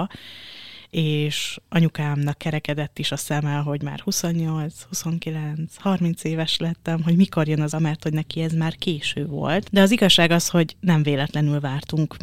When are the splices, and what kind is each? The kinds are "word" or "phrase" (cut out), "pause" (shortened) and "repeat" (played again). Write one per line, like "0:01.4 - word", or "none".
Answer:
0:07.7 - word